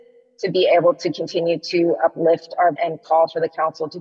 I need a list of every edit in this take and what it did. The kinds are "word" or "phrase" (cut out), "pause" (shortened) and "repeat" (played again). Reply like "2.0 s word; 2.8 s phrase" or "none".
2.7 s word